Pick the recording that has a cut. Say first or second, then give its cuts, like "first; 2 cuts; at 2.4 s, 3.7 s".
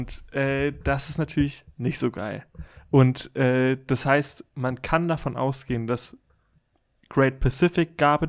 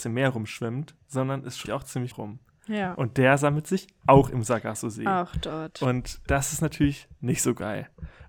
second; 3 cuts; at 1.7 s, 2.1 s, 6.3 s